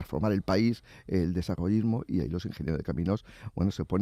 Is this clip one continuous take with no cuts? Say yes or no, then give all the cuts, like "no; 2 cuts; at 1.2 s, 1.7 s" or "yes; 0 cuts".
yes; 0 cuts